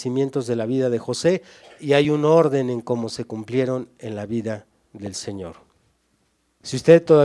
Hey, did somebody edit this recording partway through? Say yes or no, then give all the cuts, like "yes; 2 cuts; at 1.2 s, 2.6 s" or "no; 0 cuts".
no; 0 cuts